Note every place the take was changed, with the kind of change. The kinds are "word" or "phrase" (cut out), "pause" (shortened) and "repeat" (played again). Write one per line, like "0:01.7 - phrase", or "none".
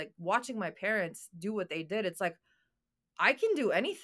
none

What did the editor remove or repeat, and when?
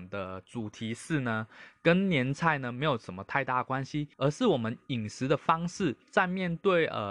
0:04.1 - pause
0:06.0 - pause

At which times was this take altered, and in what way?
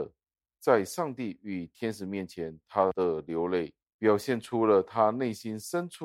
0:03.9 - pause

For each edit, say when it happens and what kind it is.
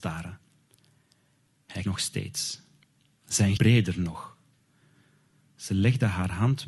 0:01.8 - word
0:03.6 - word

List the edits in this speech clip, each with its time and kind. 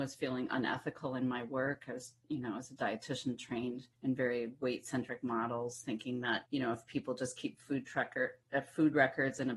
0:03.9 - pause
0:06.4 - pause

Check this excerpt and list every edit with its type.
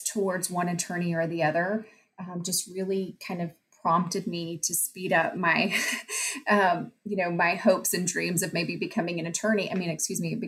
none

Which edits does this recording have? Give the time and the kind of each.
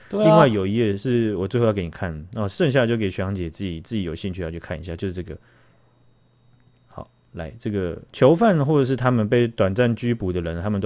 0:08.1 - pause

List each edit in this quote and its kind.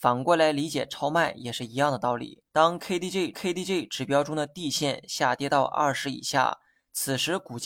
0:02.5 - pause
0:03.3 - repeat

